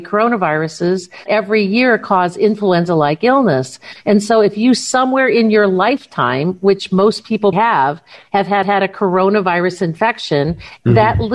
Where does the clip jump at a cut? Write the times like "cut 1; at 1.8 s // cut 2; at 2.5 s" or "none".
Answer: cut 1; at 1.3 s // cut 2; at 7.5 s // cut 3; at 8.6 s

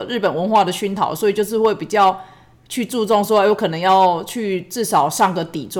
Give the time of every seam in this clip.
none

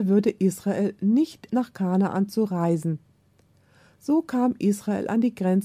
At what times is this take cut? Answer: cut 1; at 1.5 s

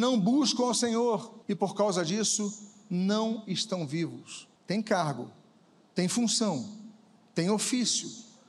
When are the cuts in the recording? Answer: cut 1; at 1.4 s // cut 2; at 4.6 s

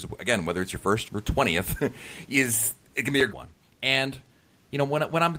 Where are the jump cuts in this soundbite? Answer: cut 1; at 1.1 s // cut 2; at 3.3 s

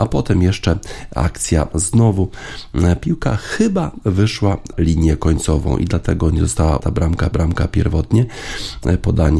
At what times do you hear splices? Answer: cut 1; at 1.7 s // cut 2; at 4.7 s // cut 3; at 6.8 s // cut 4; at 7.3 s

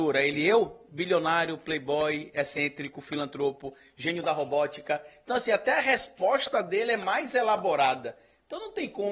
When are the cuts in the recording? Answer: none

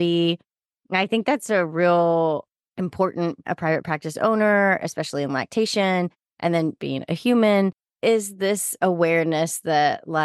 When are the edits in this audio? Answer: cut 1; at 3.4 s // cut 2; at 6.8 s

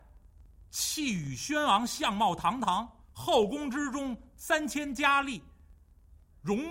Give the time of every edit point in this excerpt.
cut 1; at 3.0 s

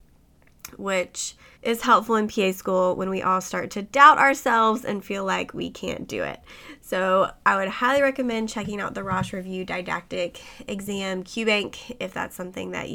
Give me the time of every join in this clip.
cut 1; at 1.5 s

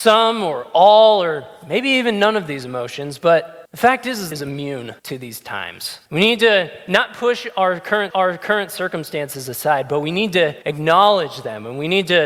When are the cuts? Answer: cut 1; at 3.7 s // cut 2; at 4.3 s // cut 3; at 5.0 s // cut 4; at 6.1 s // cut 5; at 8.1 s // cut 6; at 10.6 s

